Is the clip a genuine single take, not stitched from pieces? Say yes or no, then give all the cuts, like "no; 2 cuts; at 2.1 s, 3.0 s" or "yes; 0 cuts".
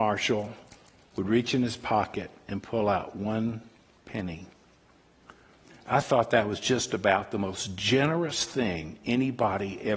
yes; 0 cuts